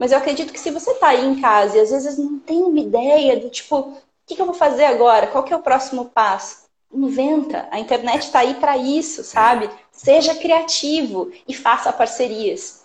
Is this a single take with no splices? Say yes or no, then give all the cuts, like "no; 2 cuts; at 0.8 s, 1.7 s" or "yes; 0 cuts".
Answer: yes; 0 cuts